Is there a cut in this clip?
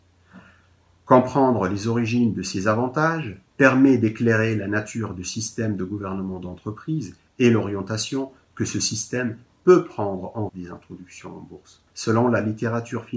yes; 3 cuts; at 3.5 s, 10.5 s, 11.9 s

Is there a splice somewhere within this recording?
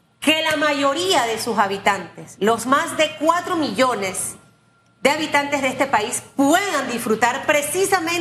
no; 0 cuts

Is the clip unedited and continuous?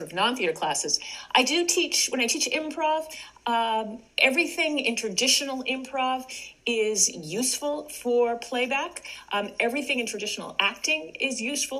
yes; 0 cuts

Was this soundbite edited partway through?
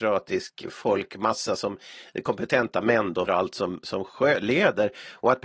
yes; 1 cut; at 3.3 s

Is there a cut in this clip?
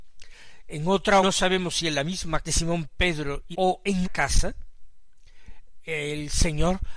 yes; 4 cuts; at 1.2 s, 2.4 s, 3.5 s, 4.0 s

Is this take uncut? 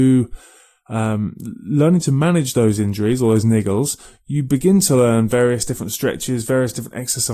yes; 0 cuts

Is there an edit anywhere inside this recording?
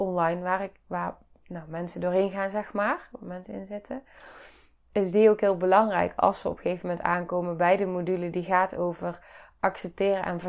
no; 0 cuts

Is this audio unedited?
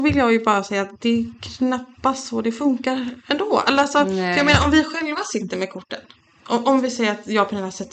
yes; 0 cuts

